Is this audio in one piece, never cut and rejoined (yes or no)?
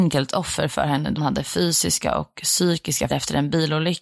no